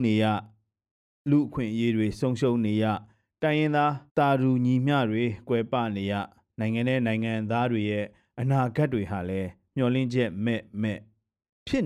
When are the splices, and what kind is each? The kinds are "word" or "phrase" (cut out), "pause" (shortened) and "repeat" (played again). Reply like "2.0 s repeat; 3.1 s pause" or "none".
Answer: 4.1 s pause